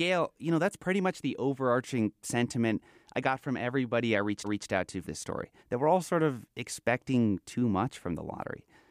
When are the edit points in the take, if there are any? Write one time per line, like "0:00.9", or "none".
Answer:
0:04.4
0:05.0
0:05.6